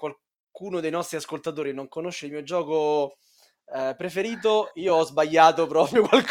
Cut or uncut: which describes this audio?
uncut